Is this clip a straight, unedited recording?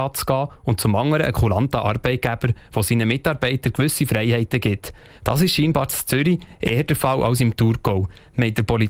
yes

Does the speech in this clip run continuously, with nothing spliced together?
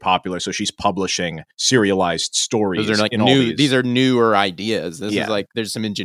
no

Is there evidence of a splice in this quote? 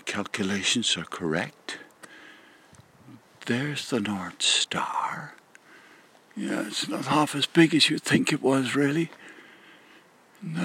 no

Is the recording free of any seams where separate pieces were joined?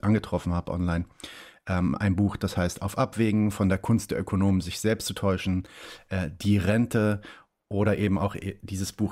yes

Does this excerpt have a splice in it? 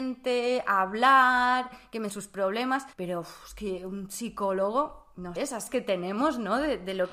yes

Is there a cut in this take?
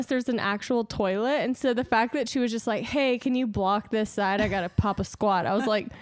no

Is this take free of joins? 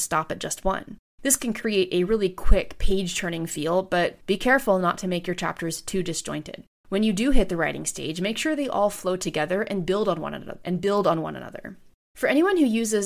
yes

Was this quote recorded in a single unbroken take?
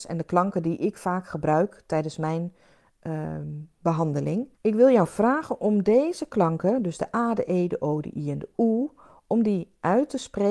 no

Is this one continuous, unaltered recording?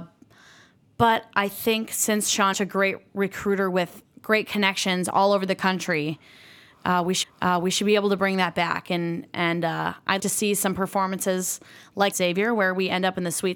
no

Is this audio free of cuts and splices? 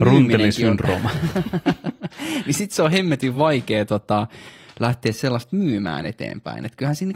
yes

